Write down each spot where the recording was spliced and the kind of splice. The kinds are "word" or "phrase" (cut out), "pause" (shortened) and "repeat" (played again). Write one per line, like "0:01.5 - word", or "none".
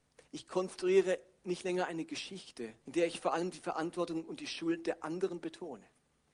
0:02.8 - pause